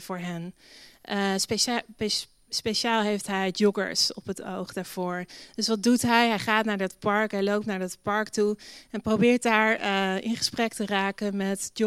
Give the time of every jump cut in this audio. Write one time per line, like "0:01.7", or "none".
none